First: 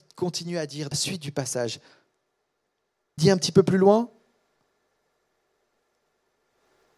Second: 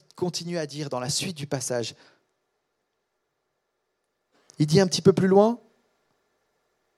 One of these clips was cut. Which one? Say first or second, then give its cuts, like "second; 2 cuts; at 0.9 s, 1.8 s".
first; 2 cuts; at 0.9 s, 3.2 s